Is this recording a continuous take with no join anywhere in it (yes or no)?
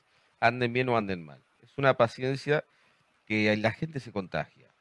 yes